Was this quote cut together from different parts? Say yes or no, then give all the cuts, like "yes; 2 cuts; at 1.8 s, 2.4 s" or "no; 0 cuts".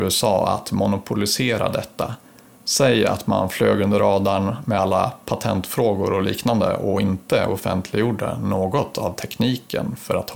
no; 0 cuts